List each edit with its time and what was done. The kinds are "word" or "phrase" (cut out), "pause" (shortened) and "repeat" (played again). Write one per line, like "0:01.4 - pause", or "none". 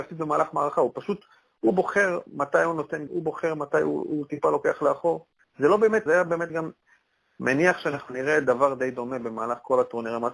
0:03.1 - word
0:05.4 - pause
0:06.1 - phrase
0:06.5 - phrase